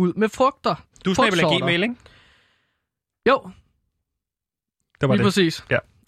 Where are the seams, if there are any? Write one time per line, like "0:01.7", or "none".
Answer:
none